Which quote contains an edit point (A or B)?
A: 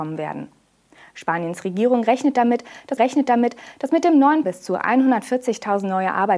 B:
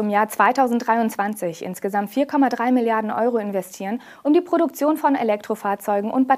A